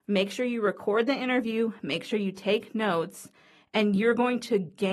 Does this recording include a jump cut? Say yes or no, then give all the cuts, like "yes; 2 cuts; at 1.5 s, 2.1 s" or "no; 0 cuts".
no; 0 cuts